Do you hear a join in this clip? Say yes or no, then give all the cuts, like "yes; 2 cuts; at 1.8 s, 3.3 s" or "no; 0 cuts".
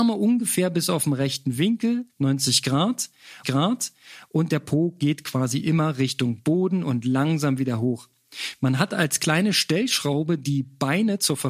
yes; 2 cuts; at 2.1 s, 3.4 s